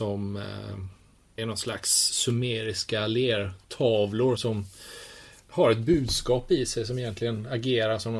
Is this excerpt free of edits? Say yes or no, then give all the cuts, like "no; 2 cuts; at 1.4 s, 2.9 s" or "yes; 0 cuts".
no; 2 cuts; at 1.4 s, 4.4 s